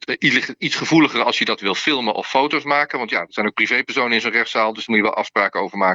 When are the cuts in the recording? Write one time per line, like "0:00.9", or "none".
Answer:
none